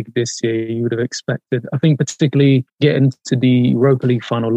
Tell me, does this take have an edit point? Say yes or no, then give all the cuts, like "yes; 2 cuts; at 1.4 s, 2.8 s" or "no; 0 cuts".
yes; 1 cut; at 2.7 s